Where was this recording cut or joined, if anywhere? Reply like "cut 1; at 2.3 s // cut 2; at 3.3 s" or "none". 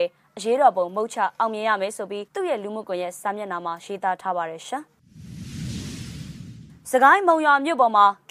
cut 1; at 2.3 s